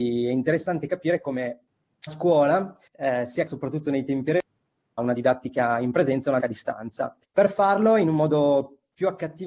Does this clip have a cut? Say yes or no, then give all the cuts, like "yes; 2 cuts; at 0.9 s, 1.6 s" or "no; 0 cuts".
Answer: yes; 6 cuts; at 2.1 s, 2.9 s, 3.5 s, 5.0 s, 6.4 s, 7.2 s